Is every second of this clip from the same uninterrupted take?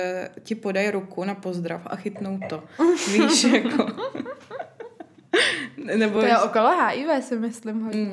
yes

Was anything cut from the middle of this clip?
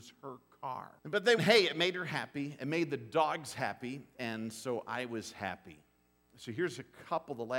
yes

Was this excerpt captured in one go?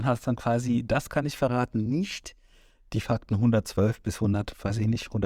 yes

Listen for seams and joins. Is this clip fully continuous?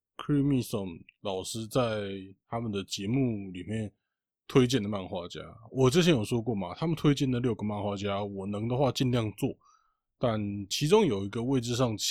yes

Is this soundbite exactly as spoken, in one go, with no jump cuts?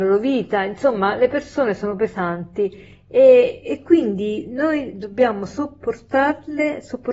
yes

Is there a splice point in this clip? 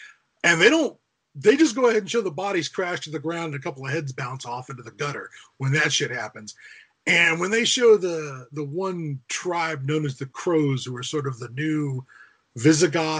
no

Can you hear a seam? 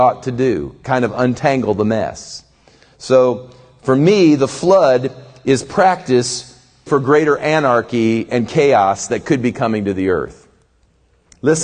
yes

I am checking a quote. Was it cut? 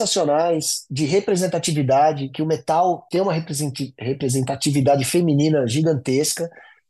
yes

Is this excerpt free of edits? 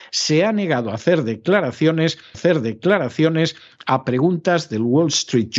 no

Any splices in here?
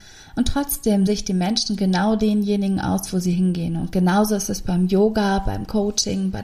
yes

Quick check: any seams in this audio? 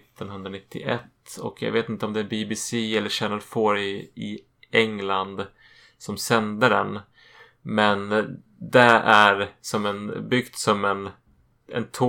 no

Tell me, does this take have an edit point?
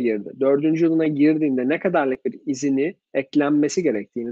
yes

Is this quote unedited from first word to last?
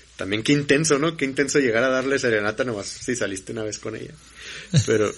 yes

